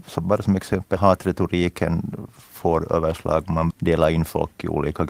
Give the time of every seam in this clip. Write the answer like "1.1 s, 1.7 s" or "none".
1.0 s, 3.7 s